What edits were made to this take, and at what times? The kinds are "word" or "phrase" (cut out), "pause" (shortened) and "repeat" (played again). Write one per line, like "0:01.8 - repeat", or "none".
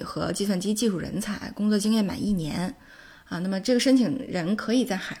none

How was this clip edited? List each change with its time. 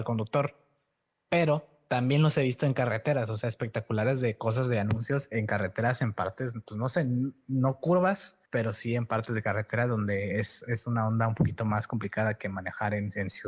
0:08.5 - pause

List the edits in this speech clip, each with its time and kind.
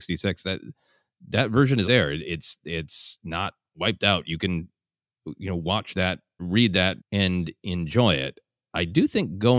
0:01.8 - word
0:06.4 - word
0:07.0 - word

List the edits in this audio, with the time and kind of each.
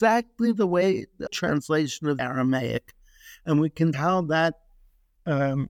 0:01.3 - word
0:02.2 - word
0:03.9 - word

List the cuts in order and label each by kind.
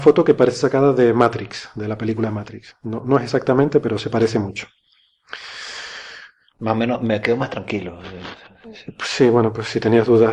none

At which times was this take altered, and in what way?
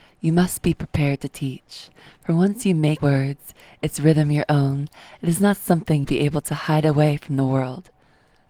0:03.0 - word
0:06.0 - word

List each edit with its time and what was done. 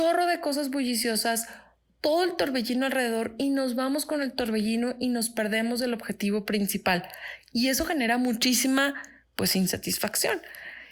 none

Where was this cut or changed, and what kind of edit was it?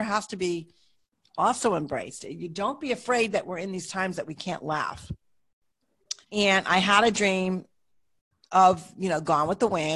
0:06.2 - pause

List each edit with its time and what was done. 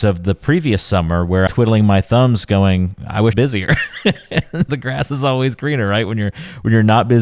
0:01.5 - phrase
0:03.3 - phrase
0:04.7 - word

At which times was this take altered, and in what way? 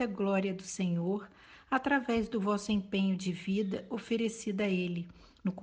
none

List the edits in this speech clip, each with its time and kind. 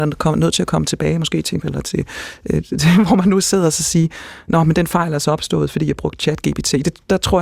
0:01.6 - word

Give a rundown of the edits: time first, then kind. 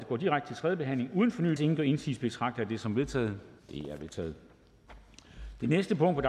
0:01.6 - phrase
0:03.6 - pause

